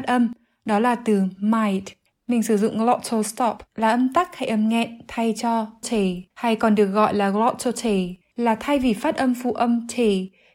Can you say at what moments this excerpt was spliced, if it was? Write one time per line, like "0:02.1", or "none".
0:03.7
0:06.3
0:08.2